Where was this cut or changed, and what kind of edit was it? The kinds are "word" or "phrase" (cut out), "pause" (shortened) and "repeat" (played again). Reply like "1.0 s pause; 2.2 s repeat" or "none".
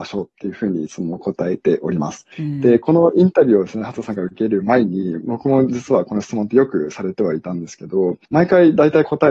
2.3 s pause; 8.2 s pause